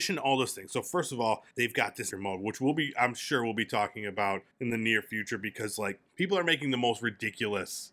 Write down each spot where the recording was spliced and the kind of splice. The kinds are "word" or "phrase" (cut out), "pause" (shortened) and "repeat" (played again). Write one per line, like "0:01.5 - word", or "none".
0:01.5 - pause
0:02.1 - phrase
0:04.5 - pause
0:06.1 - pause